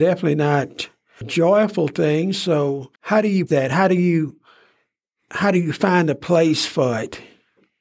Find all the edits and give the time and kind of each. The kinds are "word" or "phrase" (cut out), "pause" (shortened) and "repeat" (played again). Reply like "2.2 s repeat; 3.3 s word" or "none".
1.2 s word; 3.0 s pause; 3.5 s word